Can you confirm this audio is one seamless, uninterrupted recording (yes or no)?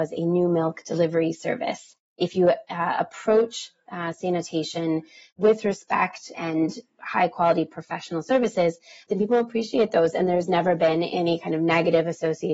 yes